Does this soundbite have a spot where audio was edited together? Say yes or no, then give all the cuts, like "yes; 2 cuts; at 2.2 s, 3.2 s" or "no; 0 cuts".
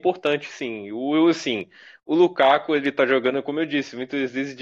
no; 0 cuts